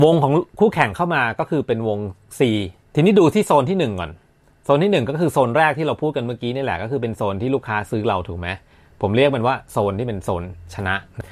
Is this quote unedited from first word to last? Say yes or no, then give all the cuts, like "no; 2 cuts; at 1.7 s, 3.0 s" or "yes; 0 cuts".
yes; 0 cuts